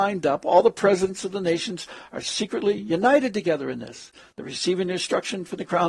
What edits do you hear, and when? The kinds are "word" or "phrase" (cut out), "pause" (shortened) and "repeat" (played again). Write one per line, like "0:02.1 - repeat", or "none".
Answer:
none